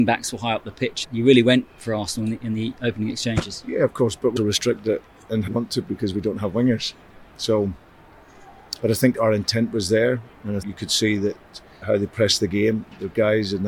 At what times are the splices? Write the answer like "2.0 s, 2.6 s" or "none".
1.0 s, 4.4 s, 5.5 s, 5.8 s, 8.8 s, 10.6 s, 11.8 s